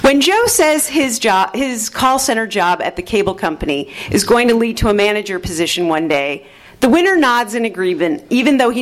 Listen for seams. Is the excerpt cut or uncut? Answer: uncut